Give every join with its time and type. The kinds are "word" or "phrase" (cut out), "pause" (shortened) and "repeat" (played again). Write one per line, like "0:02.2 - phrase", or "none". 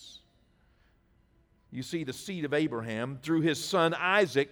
none